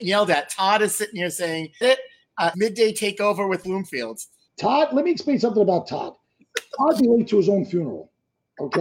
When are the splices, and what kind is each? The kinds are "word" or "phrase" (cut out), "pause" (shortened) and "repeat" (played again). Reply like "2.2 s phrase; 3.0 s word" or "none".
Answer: 1.8 s word; 2.5 s word; 3.6 s word; 4.5 s word; 7.0 s word